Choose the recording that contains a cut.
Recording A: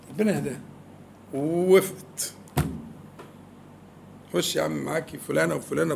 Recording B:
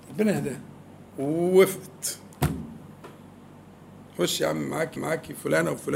B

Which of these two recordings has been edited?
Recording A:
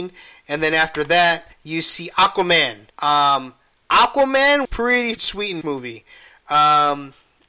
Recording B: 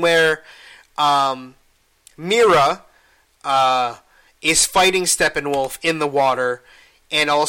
A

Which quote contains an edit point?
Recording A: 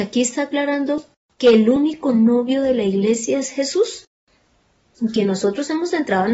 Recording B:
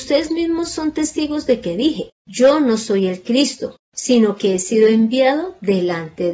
B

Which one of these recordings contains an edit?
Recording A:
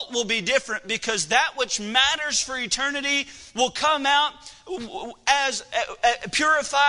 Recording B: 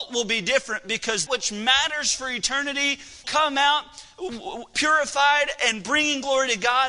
B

